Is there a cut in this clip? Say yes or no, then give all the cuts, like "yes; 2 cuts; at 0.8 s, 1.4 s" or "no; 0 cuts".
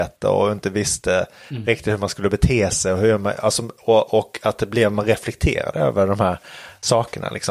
no; 0 cuts